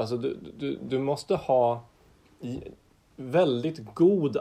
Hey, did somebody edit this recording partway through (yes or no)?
no